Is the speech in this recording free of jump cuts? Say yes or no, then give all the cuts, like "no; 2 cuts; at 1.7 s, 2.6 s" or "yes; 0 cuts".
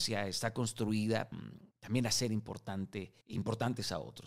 no; 3 cuts; at 1.3 s, 1.7 s, 3.2 s